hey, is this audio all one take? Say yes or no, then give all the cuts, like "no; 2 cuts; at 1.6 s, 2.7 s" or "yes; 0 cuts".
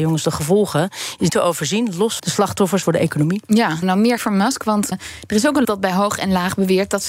no; 7 cuts; at 1.3 s, 2.2 s, 2.8 s, 3.8 s, 4.2 s, 4.9 s, 5.6 s